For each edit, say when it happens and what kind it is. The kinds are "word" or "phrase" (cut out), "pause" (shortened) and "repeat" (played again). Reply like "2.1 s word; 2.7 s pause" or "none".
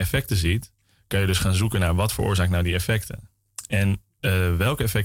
4.1 s pause